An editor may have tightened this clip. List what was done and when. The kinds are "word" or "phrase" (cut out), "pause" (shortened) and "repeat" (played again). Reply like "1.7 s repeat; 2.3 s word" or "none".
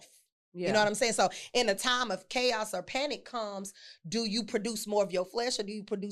none